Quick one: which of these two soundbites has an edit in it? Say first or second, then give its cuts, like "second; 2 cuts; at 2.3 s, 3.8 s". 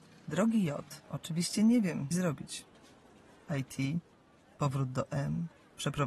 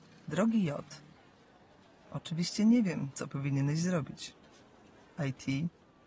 first; 2 cuts; at 1.0 s, 2.1 s